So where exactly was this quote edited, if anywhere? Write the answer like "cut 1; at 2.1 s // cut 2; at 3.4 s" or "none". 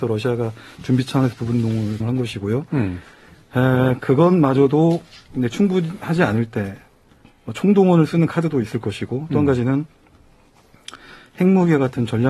cut 1; at 2.0 s